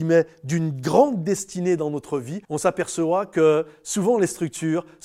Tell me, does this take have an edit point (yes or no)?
yes